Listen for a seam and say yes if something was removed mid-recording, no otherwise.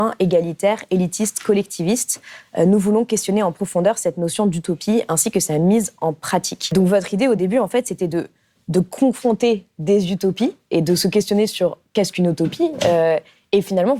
no